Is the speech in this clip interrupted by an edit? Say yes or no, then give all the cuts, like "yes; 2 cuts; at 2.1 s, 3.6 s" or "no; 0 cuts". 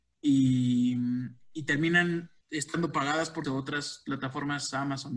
yes; 2 cuts; at 2.4 s, 3.4 s